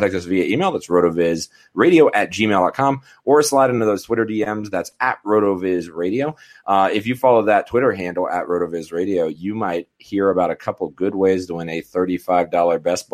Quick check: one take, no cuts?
yes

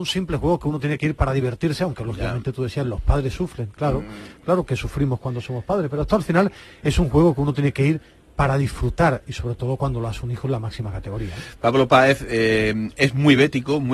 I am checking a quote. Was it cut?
no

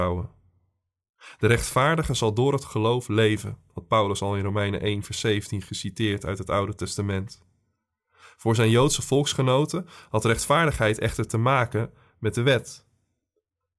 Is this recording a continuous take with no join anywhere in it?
yes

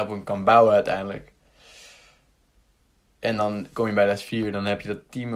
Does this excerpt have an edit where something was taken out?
no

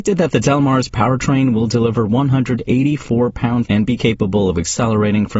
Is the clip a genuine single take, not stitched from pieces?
no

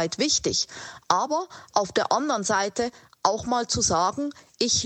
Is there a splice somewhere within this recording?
no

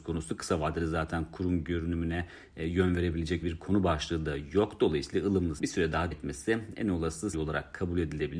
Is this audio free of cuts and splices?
no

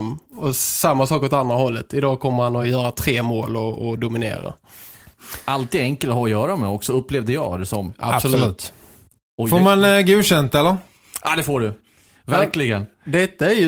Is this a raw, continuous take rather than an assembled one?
yes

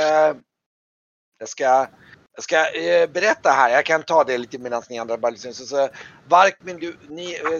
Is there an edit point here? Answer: no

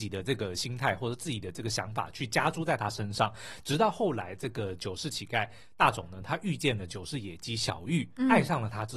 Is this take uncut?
yes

